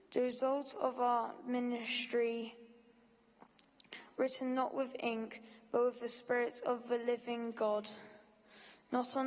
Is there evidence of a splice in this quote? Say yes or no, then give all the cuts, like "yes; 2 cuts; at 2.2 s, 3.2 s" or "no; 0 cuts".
no; 0 cuts